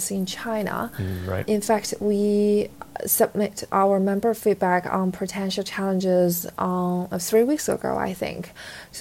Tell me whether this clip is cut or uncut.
uncut